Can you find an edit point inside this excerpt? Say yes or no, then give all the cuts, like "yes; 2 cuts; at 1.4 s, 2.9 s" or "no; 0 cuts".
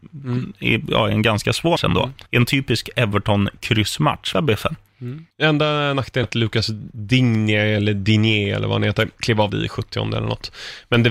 yes; 7 cuts; at 1.8 s, 2.3 s, 4.3 s, 5.3 s, 6.2 s, 9.1 s, 9.5 s